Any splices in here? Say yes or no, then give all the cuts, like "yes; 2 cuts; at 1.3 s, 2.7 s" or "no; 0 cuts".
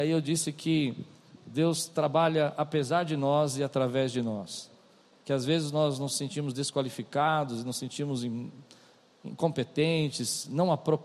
no; 0 cuts